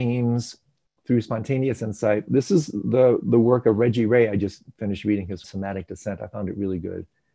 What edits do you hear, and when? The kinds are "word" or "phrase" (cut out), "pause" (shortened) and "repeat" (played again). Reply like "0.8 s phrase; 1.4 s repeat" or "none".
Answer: 5.4 s phrase